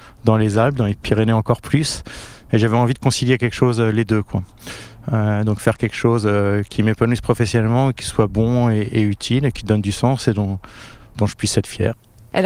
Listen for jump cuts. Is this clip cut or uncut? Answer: uncut